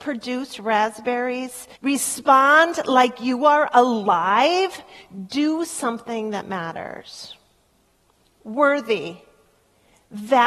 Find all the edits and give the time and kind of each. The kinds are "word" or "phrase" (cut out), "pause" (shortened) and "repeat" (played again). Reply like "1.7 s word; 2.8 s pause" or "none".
1.8 s pause

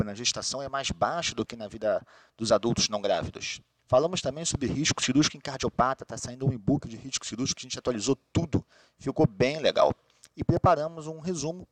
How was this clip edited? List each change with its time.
none

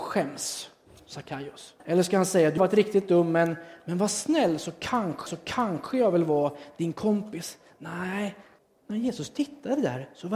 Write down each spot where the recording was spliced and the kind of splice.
1.8 s pause; 2.6 s word; 5.3 s repeat; 8.6 s pause

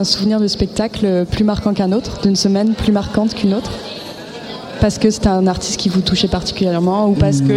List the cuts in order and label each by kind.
none

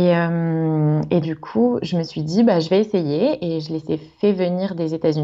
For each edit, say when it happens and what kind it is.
1.2 s word

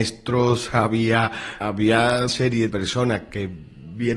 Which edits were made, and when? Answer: 1.6 s word; 2.3 s word; 2.7 s word

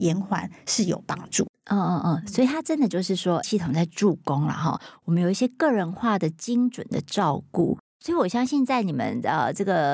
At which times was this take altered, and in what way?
3.4 s word

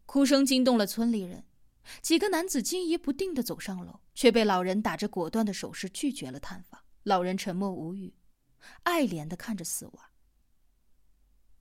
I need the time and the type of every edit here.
4.1 s pause; 6.9 s pause

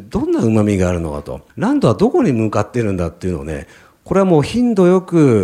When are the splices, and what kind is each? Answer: 1.5 s pause

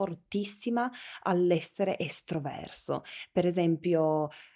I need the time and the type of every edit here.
none

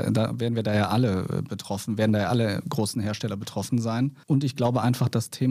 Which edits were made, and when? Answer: 4.2 s pause

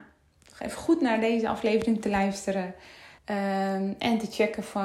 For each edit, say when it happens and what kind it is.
3.2 s pause

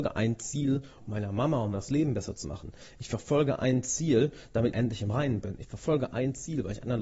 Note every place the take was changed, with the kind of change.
1.0 s word; 1.7 s phrase; 4.7 s phrase

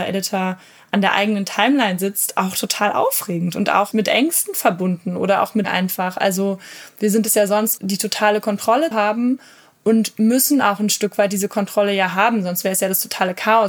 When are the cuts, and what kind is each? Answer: 3.9 s word; 5.6 s word; 7.8 s word; 8.9 s word

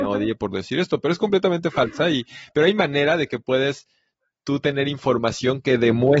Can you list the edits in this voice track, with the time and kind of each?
none

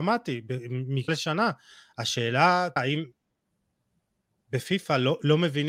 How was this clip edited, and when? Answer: 1.1 s word; 2.8 s word

